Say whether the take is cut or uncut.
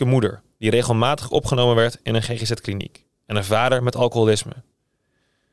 uncut